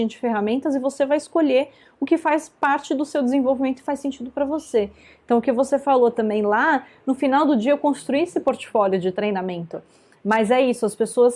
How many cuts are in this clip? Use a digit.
0